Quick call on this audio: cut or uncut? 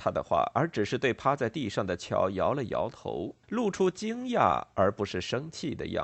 cut